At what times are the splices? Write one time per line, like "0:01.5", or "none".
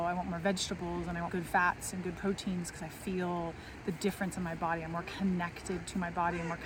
0:01.3